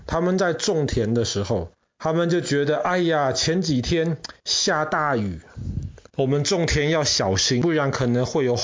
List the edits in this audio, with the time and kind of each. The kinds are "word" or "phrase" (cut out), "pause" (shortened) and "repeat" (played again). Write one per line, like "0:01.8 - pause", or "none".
0:01.9 - pause
0:06.1 - pause

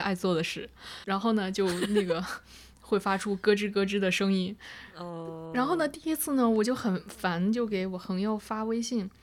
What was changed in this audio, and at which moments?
0:01.0 - word

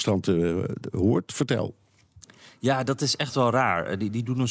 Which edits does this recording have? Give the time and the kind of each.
none

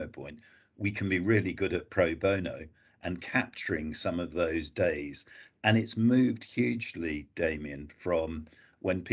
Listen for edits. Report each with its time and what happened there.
none

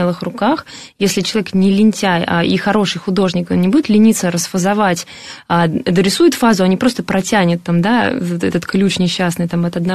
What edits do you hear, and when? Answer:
none

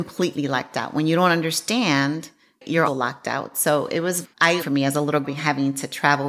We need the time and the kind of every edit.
0:02.8 - word
0:04.2 - word
0:04.6 - word
0:05.2 - word

